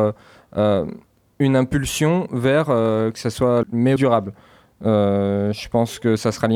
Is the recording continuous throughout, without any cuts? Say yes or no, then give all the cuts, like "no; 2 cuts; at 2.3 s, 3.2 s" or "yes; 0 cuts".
no; 2 cuts; at 3.6 s, 4.0 s